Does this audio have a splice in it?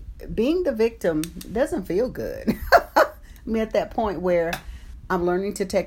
no; 0 cuts

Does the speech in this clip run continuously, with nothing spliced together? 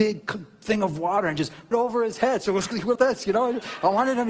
no; 2 cuts; at 1.7 s, 3.0 s

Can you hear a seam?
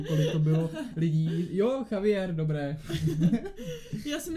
no; 0 cuts

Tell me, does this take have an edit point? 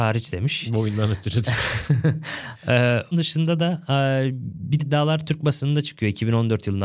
yes; 2 cuts; at 3.1 s, 4.8 s

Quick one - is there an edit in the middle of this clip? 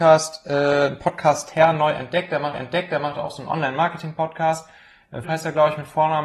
yes; 2 cuts; at 2.5 s, 5.2 s

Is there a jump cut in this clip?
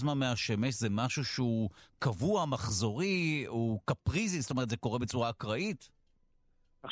no; 0 cuts

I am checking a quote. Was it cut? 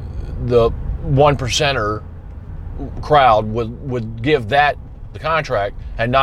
yes; 1 cut; at 5.1 s

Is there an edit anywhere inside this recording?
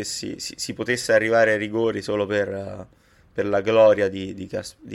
no; 0 cuts

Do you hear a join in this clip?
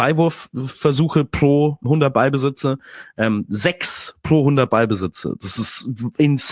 yes; 1 cut; at 1.8 s

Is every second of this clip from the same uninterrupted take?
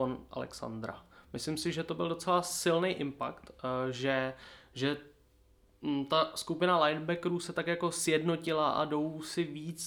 yes; 0 cuts

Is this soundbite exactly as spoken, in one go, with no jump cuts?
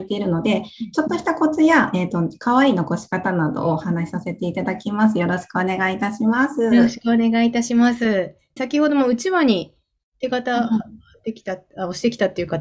no; 1 cut; at 8.6 s

